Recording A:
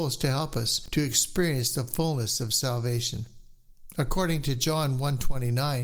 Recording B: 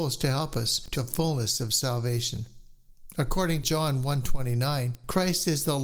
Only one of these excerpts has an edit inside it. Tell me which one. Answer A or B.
B